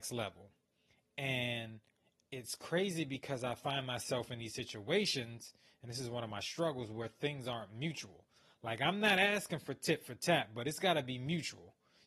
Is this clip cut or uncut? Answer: uncut